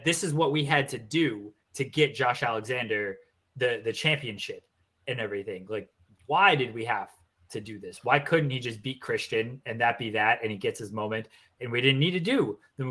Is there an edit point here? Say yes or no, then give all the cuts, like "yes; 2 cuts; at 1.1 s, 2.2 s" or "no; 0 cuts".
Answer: no; 0 cuts